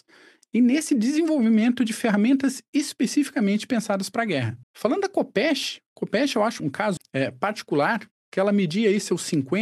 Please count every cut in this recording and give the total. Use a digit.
3